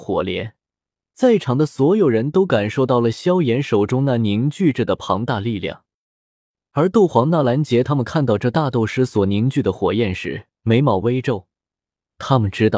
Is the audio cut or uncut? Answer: cut